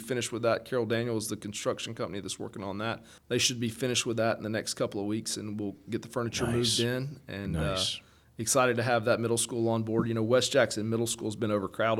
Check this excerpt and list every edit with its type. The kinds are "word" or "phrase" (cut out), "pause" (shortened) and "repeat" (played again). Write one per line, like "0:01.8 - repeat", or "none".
none